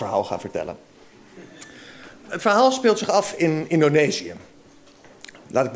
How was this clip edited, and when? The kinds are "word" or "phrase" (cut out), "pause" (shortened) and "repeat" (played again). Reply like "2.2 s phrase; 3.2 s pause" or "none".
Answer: none

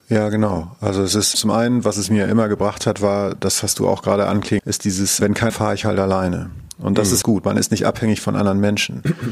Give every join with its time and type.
1.3 s word; 4.6 s word; 5.2 s word; 5.5 s word; 7.2 s phrase

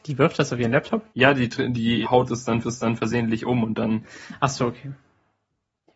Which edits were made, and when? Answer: 1.1 s pause; 2.0 s word; 2.6 s repeat

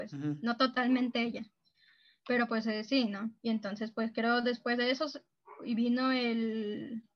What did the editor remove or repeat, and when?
3.4 s pause

